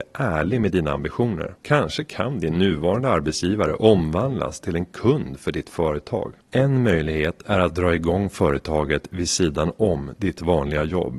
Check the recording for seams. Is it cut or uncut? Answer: cut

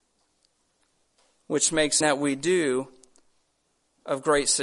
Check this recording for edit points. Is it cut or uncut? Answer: cut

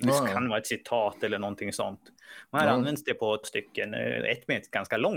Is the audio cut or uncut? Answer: cut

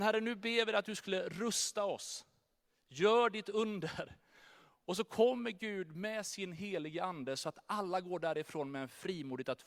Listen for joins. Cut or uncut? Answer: uncut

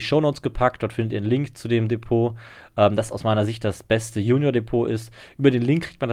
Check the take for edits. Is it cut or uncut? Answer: uncut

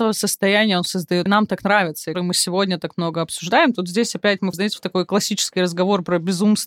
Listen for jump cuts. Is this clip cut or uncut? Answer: cut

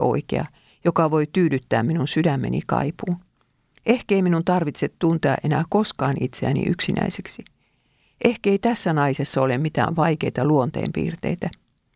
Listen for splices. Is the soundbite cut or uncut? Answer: uncut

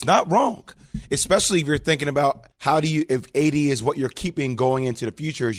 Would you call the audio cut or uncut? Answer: cut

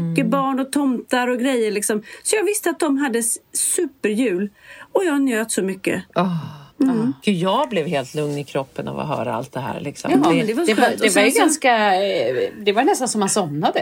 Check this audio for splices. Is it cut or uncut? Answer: cut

